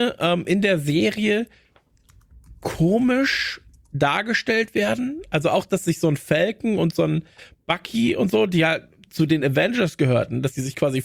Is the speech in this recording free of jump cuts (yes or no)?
yes